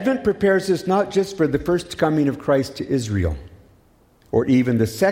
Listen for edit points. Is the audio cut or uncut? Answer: uncut